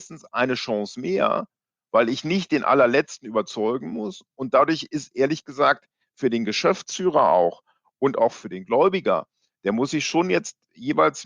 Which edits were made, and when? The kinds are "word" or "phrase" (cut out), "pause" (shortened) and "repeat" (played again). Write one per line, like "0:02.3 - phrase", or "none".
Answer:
none